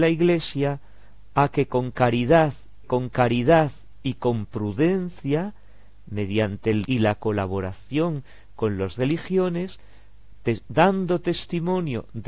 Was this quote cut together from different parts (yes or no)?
yes